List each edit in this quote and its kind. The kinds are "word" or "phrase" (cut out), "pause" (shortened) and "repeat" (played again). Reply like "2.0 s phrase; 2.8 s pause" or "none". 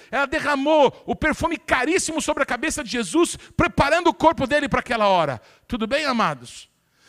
none